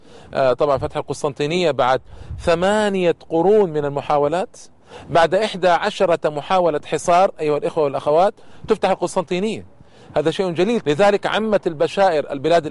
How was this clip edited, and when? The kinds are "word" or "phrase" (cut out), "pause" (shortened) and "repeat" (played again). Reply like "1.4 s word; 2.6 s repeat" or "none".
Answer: 10.8 s word